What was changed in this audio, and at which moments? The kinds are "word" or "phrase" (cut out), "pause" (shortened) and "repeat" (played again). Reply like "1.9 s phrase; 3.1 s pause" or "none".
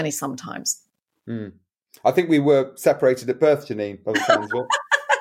none